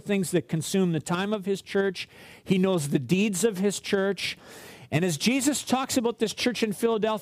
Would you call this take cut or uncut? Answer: uncut